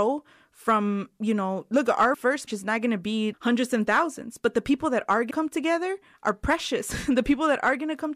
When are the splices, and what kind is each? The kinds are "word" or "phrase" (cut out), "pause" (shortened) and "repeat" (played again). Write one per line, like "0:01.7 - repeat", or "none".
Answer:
0:02.1 - word
0:02.5 - word
0:03.3 - word
0:05.3 - word